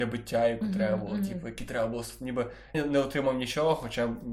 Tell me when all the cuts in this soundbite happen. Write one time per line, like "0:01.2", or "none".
0:02.7

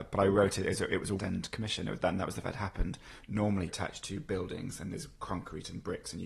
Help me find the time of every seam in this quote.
0:01.2
0:02.4
0:03.7

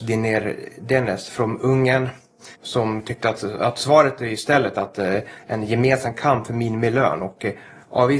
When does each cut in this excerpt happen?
0:02.5

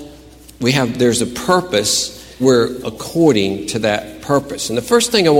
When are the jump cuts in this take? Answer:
0:02.4
0:02.8

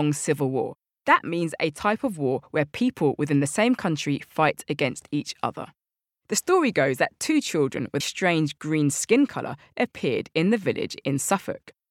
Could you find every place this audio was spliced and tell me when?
0:08.0

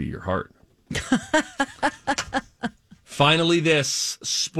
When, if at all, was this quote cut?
none

